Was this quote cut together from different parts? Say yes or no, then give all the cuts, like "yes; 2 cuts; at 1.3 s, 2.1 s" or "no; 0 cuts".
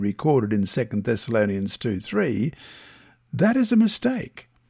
no; 0 cuts